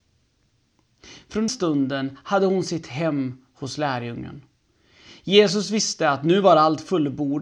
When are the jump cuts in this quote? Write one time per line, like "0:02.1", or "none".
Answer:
0:01.5